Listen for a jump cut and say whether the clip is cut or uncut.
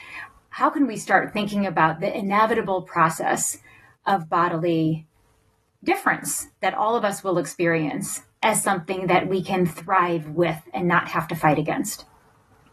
uncut